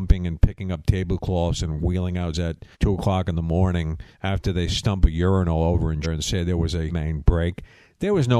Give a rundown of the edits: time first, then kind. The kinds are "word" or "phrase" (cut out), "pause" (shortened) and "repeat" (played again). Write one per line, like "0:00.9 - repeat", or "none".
0:02.3 - word
0:02.7 - pause
0:04.1 - pause
0:05.0 - word
0:06.0 - word
0:06.9 - word

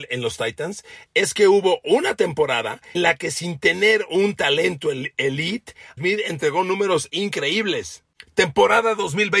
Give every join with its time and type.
0:02.9 - word
0:06.0 - word

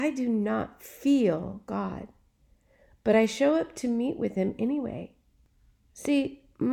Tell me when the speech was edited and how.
none

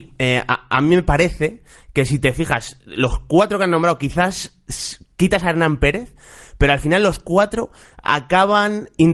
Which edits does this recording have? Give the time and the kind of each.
none

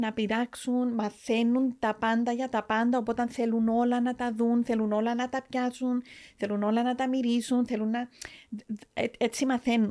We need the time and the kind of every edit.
none

